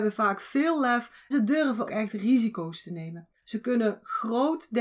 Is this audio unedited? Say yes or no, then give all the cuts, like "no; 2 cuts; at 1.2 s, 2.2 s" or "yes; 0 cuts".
no; 3 cuts; at 1.3 s, 1.9 s, 3.4 s